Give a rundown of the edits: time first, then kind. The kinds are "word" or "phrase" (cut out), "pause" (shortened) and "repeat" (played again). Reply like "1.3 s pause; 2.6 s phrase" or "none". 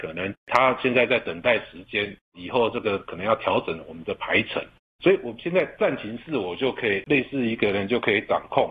none